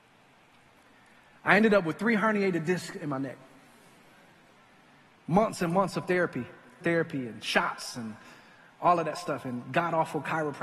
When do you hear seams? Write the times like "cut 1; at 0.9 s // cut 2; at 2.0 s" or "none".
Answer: cut 1; at 6.8 s